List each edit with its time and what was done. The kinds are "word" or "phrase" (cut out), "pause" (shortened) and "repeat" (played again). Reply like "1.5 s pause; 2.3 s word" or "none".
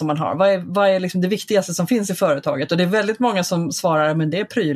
none